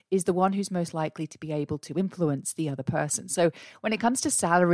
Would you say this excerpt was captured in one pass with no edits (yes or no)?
yes